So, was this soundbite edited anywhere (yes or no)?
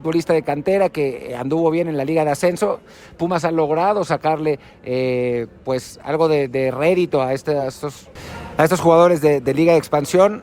no